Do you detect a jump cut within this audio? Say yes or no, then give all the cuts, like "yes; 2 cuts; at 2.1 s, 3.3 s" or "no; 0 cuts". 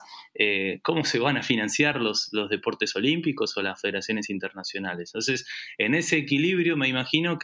no; 0 cuts